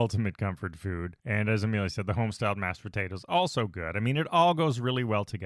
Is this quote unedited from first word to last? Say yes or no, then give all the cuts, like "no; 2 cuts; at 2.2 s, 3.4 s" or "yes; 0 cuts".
no; 1 cut; at 1.2 s